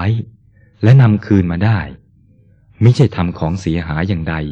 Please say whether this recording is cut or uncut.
uncut